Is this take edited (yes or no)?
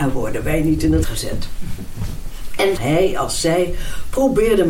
yes